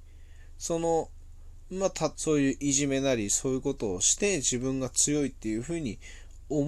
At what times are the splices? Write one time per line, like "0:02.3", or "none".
0:02.1